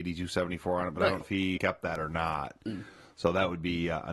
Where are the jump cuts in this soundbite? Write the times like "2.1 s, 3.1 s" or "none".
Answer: 1.2 s, 1.6 s